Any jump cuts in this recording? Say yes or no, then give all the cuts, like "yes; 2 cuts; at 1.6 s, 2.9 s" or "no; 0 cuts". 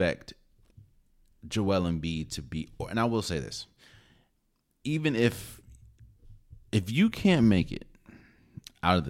no; 0 cuts